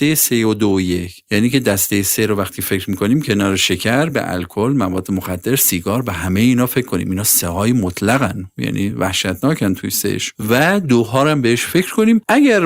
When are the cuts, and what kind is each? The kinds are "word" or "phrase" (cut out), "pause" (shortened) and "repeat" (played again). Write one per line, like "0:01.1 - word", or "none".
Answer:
none

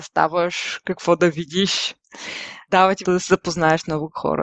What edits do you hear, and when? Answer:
0:03.0 - word

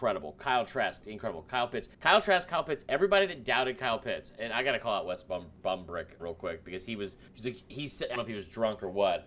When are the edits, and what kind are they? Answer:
0:01.0 - word
0:01.9 - pause
0:06.2 - word
0:07.3 - pause
0:08.2 - word

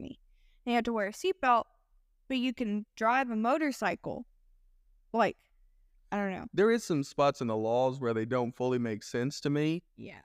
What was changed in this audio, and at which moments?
none

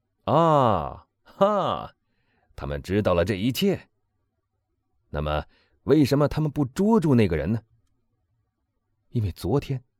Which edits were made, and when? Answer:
none

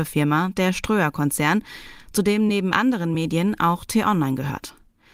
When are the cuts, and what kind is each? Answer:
none

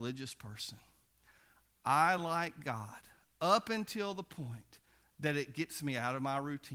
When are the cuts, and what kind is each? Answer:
none

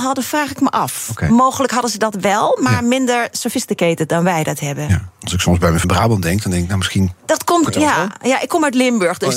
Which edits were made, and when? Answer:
0:05.8 - word
0:07.7 - word

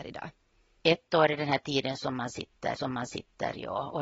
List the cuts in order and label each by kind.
0:02.8 - repeat

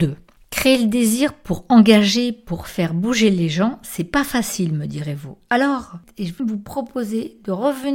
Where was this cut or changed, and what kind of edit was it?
0:06.4 - phrase

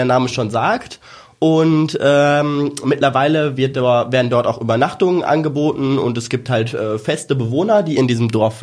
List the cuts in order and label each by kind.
none

